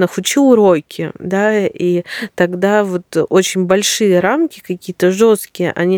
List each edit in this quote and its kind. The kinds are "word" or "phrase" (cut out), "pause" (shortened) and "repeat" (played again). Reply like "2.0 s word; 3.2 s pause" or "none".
none